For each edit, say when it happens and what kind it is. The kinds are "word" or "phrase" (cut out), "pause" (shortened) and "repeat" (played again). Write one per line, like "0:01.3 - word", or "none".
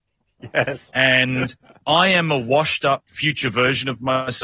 none